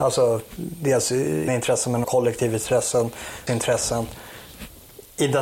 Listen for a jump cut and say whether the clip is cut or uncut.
cut